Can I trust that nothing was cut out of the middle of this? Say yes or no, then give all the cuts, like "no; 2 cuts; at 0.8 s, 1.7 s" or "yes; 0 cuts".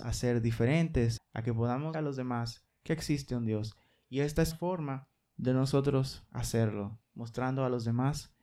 no; 3 cuts; at 1.2 s, 1.9 s, 4.5 s